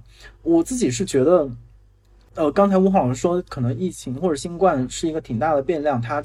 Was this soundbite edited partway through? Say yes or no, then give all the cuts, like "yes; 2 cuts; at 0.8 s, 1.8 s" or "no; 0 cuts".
no; 0 cuts